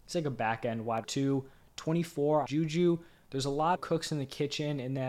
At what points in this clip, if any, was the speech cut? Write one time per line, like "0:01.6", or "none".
0:01.0
0:02.5
0:03.8